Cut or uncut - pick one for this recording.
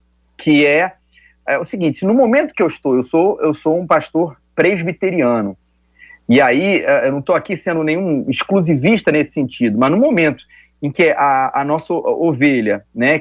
uncut